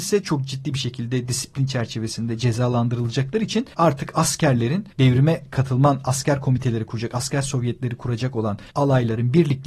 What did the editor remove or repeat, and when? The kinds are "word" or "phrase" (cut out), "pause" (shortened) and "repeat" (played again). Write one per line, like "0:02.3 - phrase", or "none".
0:03.7 - pause
0:04.9 - pause
0:08.7 - pause